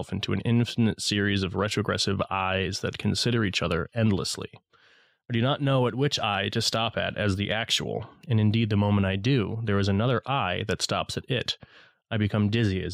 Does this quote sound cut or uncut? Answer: uncut